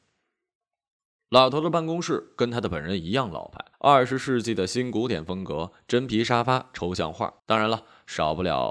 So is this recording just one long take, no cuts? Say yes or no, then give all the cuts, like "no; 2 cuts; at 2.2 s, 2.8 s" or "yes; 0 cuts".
no; 2 cuts; at 3.7 s, 7.4 s